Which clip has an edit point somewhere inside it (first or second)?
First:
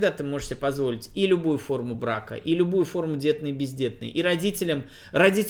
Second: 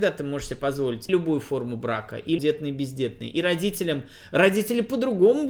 second